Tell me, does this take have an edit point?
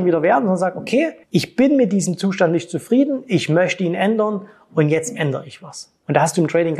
no; 0 cuts

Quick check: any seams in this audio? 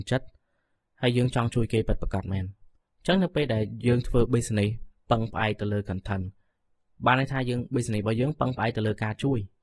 no; 0 cuts

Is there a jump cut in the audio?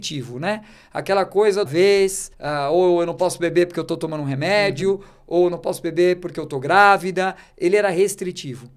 yes; 2 cuts; at 1.7 s, 2.3 s

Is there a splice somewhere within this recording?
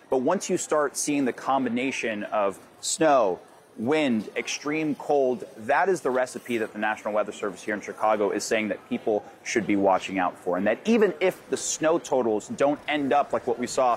no; 0 cuts

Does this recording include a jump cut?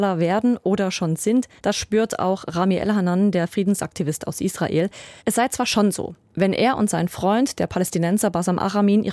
yes; 2 cuts; at 1.6 s, 5.2 s

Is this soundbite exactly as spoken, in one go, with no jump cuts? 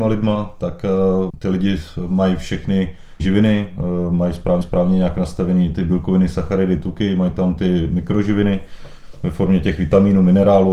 no; 3 cuts; at 1.3 s, 3.2 s, 4.6 s

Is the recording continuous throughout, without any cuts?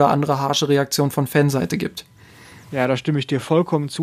yes; 0 cuts

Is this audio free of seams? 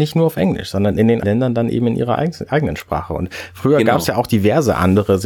no; 1 cut; at 1.2 s

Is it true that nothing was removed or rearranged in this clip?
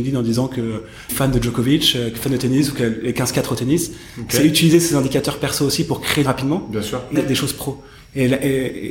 no; 3 cuts; at 1.1 s, 6.3 s, 7.2 s

